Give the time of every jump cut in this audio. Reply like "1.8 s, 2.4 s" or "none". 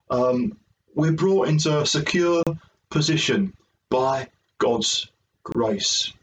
none

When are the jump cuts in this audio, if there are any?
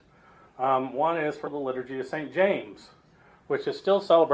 1.4 s

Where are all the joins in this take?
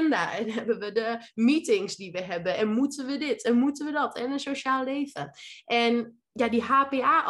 none

